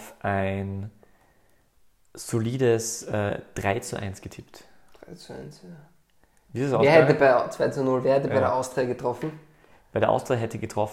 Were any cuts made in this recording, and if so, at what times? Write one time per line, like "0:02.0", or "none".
none